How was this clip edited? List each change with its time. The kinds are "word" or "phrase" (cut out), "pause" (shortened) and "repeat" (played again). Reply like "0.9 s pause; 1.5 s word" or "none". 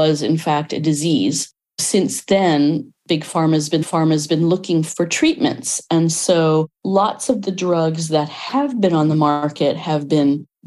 3.8 s repeat